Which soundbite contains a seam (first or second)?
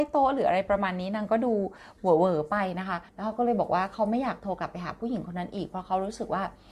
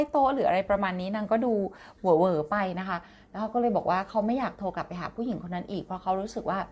first